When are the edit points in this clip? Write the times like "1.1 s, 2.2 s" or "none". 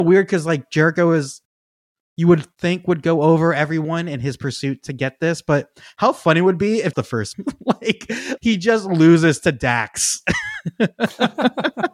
6.9 s, 7.3 s, 8.4 s